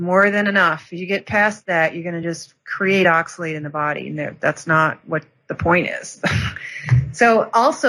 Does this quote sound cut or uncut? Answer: uncut